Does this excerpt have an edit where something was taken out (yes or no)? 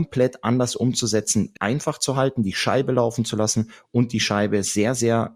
yes